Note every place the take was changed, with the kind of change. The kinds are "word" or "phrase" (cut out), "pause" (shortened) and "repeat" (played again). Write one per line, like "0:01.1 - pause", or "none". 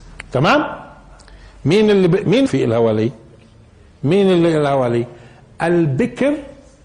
0:02.5 - phrase